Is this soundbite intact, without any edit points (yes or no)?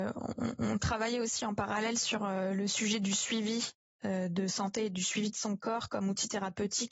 yes